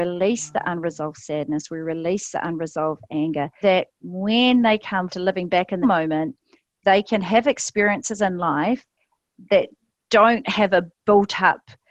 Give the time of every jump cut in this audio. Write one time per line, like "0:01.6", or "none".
0:03.6
0:05.1
0:05.8